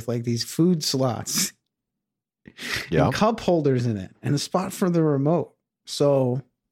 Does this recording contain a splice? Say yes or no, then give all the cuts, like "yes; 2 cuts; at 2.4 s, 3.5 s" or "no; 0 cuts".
no; 0 cuts